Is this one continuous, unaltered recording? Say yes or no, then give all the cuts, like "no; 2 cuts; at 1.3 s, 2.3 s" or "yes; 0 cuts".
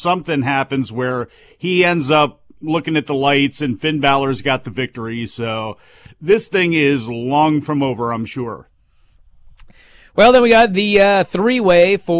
yes; 0 cuts